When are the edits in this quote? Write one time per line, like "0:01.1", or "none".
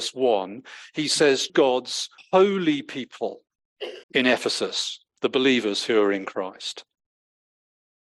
0:01.5
0:02.2
0:04.0